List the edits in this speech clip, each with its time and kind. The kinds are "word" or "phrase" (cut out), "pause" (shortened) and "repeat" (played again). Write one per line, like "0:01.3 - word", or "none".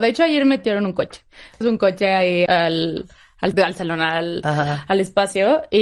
0:01.6 - phrase
0:02.5 - word
0:03.5 - word